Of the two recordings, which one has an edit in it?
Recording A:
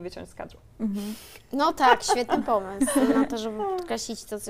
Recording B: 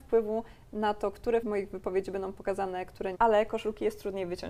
B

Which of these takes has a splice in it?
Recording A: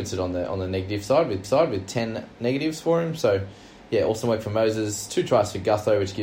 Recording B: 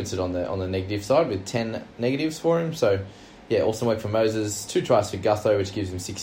A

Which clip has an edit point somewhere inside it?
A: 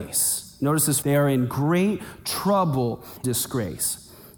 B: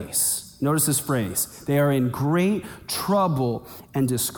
A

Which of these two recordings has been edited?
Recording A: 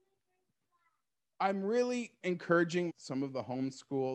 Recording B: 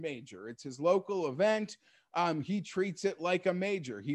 A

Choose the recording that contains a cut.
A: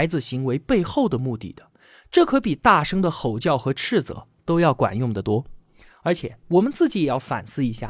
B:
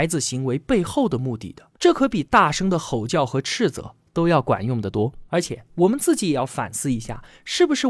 B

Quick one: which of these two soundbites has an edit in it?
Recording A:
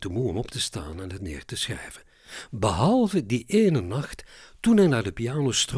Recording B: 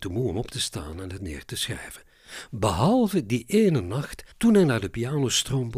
B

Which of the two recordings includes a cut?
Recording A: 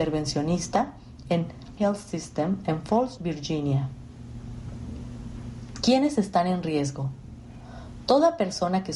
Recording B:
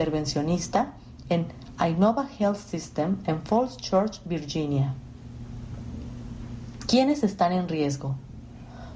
A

